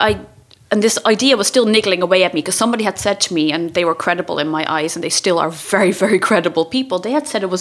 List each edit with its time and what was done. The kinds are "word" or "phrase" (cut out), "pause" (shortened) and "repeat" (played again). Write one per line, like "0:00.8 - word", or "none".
none

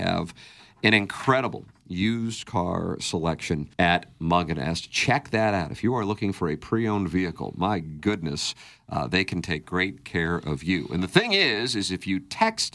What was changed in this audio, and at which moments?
0:03.7 - pause

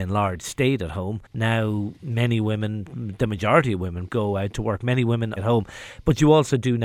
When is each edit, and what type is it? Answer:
0:01.3 - pause
0:04.1 - word
0:05.4 - phrase

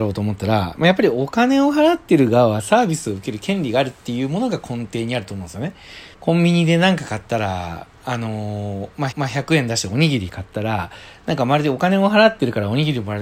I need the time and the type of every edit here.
0:06.1 - pause
0:09.1 - repeat

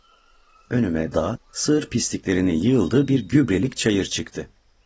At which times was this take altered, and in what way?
0:01.1 - word

